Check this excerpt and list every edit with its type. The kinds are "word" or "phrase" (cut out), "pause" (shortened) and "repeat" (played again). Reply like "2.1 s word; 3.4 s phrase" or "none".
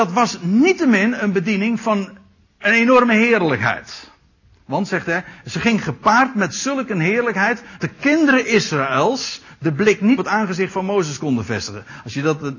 7.8 s word; 10.2 s word